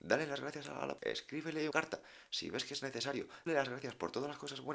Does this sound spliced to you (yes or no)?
yes